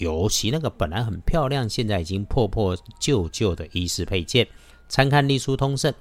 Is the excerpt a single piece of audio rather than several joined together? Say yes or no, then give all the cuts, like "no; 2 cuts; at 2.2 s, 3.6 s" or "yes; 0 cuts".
yes; 0 cuts